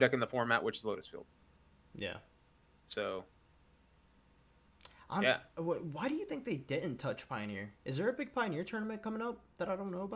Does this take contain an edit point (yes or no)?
no